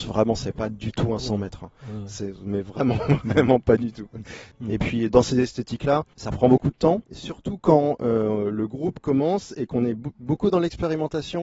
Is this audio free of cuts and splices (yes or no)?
no